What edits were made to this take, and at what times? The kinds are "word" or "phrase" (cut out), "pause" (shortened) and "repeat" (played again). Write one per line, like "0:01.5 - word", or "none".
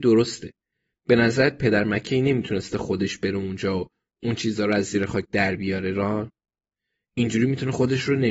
none